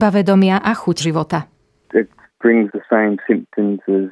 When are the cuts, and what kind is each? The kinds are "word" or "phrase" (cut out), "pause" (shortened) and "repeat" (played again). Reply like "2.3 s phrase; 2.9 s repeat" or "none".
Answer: 1.0 s word; 2.7 s word